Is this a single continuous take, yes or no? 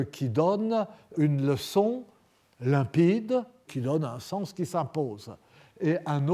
no